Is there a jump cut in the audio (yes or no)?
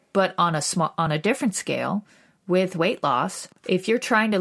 no